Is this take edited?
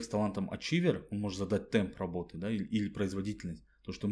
no; 0 cuts

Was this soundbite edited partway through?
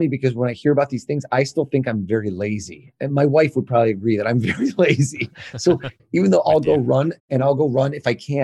yes; 1 cut; at 7.2 s

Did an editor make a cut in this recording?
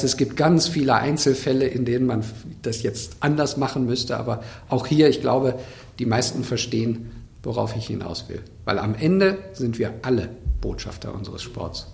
no; 0 cuts

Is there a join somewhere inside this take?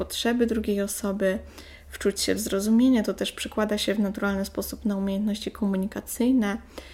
no; 0 cuts

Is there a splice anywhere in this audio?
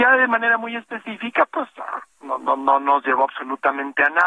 yes; 1 cut; at 2.1 s

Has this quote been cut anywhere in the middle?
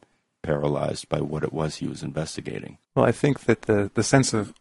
yes; 1 cut; at 2.8 s

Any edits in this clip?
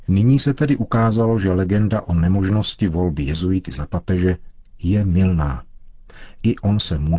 no; 0 cuts

